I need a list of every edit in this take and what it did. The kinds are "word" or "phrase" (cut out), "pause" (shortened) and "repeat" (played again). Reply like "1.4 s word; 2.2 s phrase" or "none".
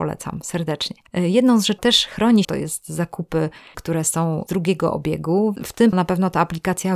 1.8 s word; 2.4 s word; 3.7 s word; 4.5 s word; 5.6 s word; 5.9 s word